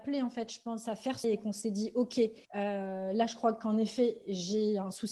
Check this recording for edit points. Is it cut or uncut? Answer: cut